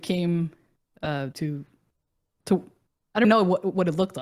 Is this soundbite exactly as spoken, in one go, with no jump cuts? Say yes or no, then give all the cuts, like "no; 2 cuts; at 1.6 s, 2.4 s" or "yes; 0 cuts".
no; 2 cuts; at 1.3 s, 3.2 s